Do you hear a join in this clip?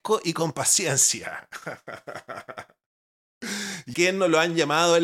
yes; 1 cut; at 3.9 s

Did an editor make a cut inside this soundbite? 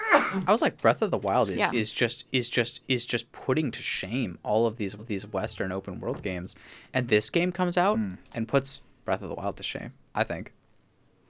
yes; 5 cuts; at 2.5 s, 5.0 s, 7.1 s, 8.2 s, 10.0 s

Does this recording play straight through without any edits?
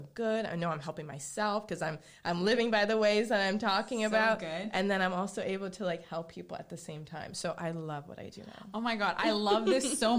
yes; 0 cuts

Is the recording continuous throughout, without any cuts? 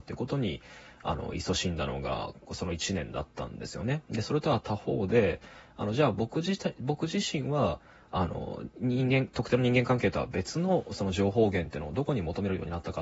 yes; 0 cuts

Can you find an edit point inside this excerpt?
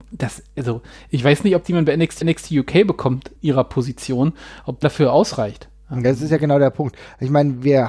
yes; 4 cuts; at 1.6 s, 2.2 s, 3.4 s, 4.8 s

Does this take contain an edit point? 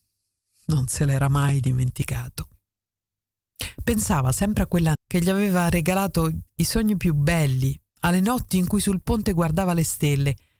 yes; 1 cut; at 4.9 s

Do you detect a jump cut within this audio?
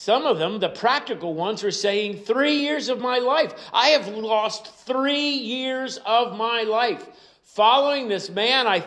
no; 0 cuts

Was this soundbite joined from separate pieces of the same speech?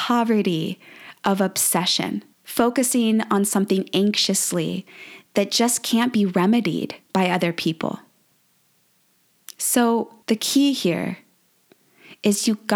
yes; 3 cuts; at 2.3 s, 7.0 s, 10.2 s

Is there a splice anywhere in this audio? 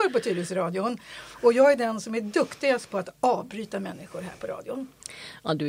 no; 0 cuts

